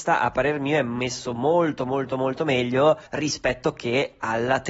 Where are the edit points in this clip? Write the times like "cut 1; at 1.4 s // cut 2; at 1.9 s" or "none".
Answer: cut 1; at 3.1 s